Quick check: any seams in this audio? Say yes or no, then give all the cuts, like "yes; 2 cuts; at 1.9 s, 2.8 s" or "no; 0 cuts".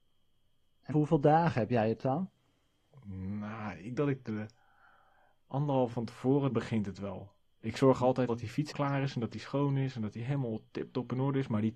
yes; 6 cuts; at 0.9 s, 4.0 s, 5.9 s, 6.5 s, 8.3 s, 8.7 s